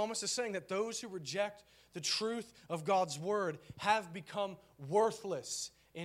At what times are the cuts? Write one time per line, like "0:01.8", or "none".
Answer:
none